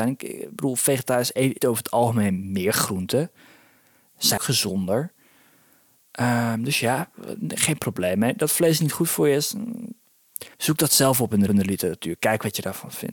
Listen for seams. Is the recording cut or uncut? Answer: cut